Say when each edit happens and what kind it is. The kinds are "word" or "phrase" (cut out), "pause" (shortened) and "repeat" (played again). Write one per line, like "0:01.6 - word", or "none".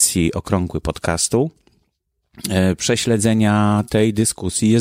none